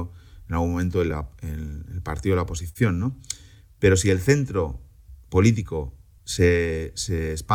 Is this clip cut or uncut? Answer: uncut